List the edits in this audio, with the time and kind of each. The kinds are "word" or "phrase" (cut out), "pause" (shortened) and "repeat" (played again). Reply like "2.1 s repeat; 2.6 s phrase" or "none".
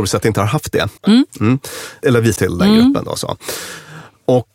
1.0 s pause; 2.4 s word